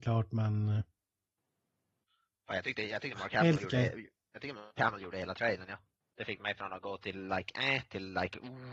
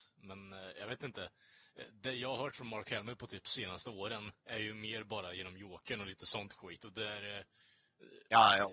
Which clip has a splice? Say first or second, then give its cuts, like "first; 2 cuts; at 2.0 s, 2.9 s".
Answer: first; 1 cut; at 6.0 s